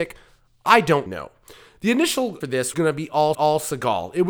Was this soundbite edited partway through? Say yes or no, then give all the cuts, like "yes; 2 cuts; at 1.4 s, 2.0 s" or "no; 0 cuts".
yes; 4 cuts; at 1.1 s, 2.4 s, 2.7 s, 3.3 s